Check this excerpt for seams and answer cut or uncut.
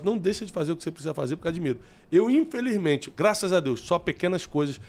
uncut